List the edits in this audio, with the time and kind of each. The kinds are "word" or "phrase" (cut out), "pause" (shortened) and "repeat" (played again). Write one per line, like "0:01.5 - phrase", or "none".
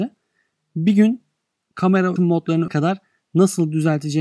0:02.2 - word
0:02.7 - word